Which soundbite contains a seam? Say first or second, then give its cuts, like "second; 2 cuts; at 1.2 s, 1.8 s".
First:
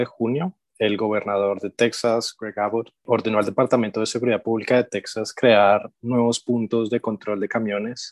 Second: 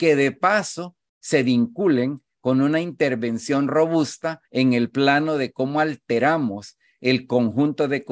second; 1 cut; at 4.4 s